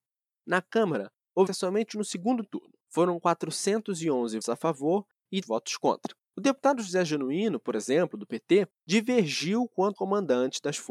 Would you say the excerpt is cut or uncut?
cut